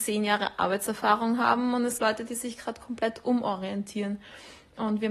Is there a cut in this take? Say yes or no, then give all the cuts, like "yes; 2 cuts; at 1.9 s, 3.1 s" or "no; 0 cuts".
yes; 1 cut; at 2.0 s